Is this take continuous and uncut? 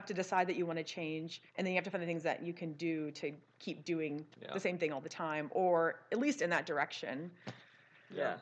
no; 2 cuts; at 1.5 s, 4.3 s

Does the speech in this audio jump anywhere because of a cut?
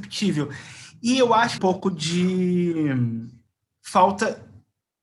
yes; 1 cut; at 1.6 s

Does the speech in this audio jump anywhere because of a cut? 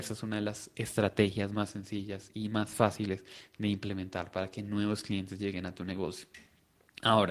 no; 0 cuts

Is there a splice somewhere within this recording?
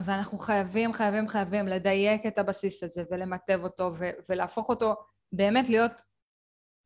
no; 0 cuts

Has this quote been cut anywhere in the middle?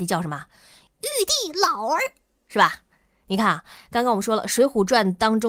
no; 0 cuts

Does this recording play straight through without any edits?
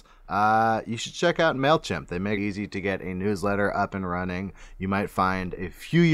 no; 1 cut; at 2.4 s

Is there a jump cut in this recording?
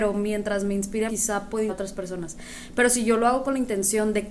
yes; 2 cuts; at 1.1 s, 1.7 s

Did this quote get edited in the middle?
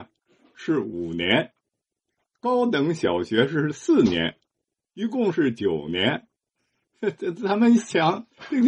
no; 0 cuts

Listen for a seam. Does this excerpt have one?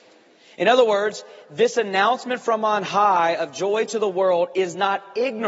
no; 0 cuts

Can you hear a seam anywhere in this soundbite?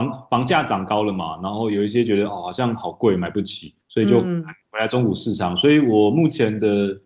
yes; 1 cut; at 3.8 s

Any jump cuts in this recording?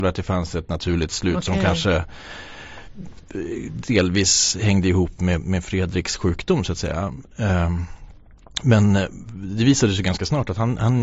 no; 0 cuts

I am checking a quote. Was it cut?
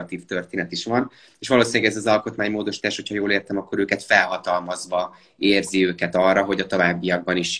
no; 0 cuts

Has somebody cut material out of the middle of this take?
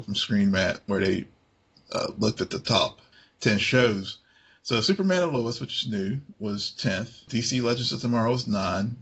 no; 0 cuts

